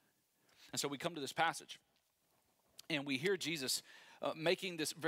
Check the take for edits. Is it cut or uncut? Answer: uncut